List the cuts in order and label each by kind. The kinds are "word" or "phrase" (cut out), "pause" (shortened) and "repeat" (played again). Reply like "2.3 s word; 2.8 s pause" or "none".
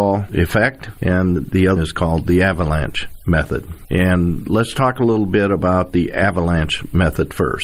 1.8 s word